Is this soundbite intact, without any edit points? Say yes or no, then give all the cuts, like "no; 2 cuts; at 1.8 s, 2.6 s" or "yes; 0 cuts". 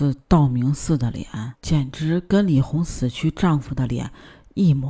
no; 1 cut; at 1.6 s